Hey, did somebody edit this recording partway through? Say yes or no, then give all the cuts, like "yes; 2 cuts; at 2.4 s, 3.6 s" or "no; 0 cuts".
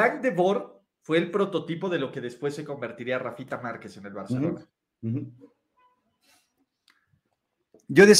no; 0 cuts